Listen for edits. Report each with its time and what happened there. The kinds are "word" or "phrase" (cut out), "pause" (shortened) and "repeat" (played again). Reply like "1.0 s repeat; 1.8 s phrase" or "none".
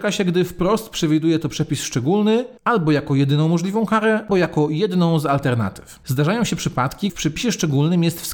2.6 s pause; 4.3 s word; 7.1 s word